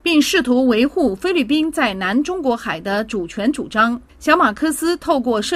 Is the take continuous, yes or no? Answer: no